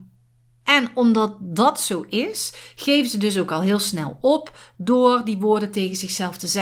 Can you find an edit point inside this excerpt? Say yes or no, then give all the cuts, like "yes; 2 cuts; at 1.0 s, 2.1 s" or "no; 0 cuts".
no; 0 cuts